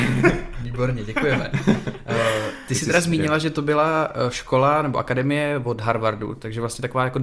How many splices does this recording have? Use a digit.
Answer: 0